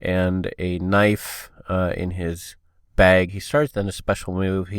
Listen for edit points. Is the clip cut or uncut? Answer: cut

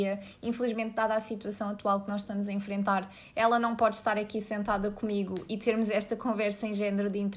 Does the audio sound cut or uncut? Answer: uncut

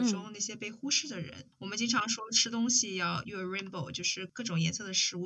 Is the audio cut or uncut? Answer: cut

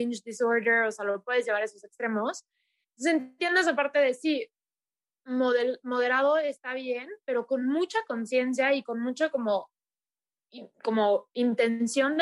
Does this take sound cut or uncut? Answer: uncut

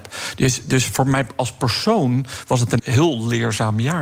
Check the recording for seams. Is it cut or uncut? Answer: cut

